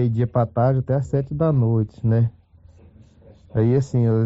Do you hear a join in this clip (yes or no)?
no